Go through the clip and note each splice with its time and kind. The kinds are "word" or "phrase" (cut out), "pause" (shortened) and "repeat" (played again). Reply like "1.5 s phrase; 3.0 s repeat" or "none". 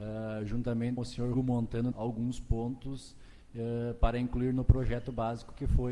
1.0 s word; 1.3 s word; 1.9 s phrase